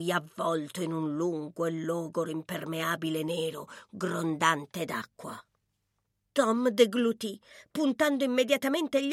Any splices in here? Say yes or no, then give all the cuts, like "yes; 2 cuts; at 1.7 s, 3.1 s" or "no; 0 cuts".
no; 0 cuts